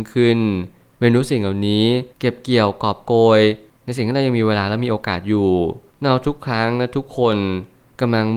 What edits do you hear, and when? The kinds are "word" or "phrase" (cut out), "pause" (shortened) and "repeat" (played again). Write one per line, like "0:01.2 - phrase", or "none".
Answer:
0:02.1 - pause